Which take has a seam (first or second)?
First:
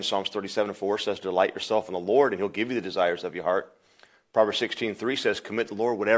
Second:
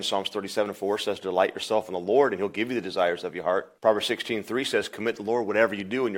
second